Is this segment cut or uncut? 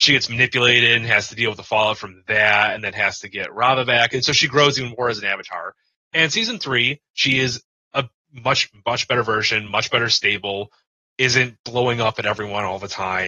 uncut